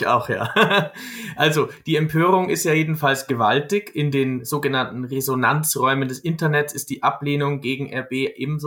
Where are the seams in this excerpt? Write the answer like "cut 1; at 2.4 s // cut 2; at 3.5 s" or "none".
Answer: none